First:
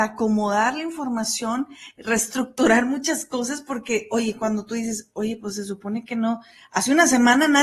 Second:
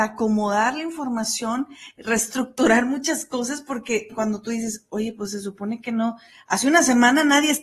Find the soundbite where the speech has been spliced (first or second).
second